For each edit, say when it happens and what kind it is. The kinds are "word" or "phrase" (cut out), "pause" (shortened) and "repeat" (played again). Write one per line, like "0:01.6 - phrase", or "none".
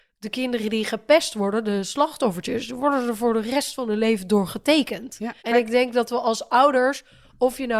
0:05.4 - pause

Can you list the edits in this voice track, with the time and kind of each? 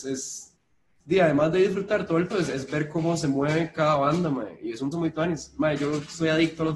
0:02.3 - word
0:04.9 - word

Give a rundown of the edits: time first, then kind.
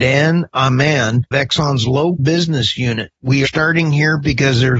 0:01.3 - phrase
0:02.2 - word
0:03.4 - word

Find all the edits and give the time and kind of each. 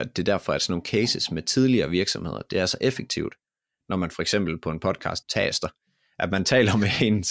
0:05.2 - word

